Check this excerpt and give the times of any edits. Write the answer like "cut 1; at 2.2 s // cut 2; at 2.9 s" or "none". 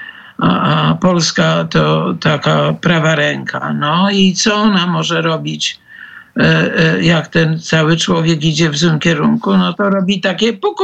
none